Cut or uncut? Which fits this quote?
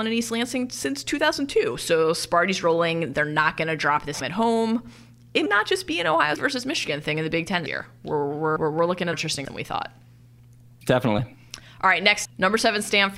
cut